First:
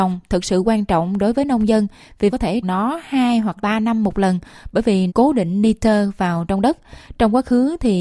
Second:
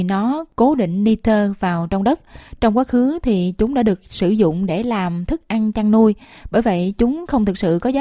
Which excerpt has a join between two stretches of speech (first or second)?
first